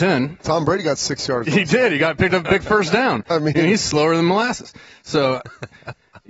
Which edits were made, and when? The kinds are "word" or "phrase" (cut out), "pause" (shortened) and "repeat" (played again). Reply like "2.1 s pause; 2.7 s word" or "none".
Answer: none